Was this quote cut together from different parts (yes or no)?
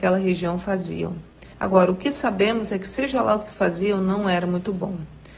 yes